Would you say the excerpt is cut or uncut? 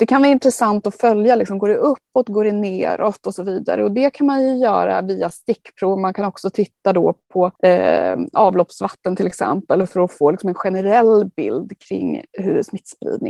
cut